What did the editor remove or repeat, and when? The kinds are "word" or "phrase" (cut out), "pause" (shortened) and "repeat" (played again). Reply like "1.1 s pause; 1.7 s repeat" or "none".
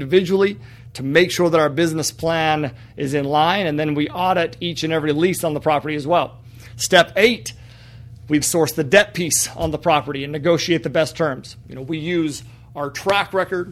8.4 s word